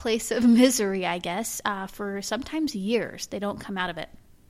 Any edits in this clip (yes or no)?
no